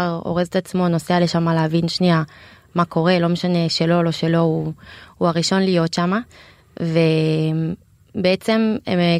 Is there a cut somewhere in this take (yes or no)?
no